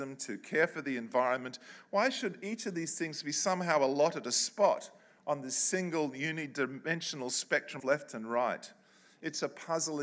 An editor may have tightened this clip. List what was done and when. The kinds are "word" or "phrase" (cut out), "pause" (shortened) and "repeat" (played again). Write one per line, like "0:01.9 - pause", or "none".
0:07.8 - word